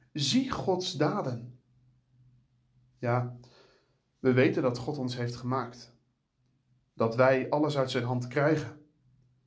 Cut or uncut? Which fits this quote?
uncut